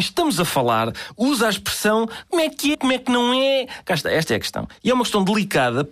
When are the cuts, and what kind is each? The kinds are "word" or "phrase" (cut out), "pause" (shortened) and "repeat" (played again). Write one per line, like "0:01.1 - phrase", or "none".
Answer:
0:02.7 - word